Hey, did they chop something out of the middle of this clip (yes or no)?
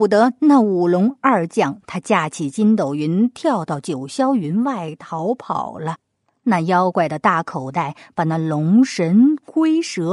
no